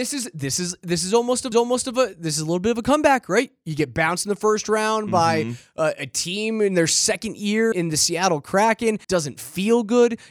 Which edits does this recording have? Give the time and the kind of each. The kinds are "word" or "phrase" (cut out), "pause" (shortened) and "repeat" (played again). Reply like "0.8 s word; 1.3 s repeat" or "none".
1.5 s repeat; 7.7 s word; 9.0 s pause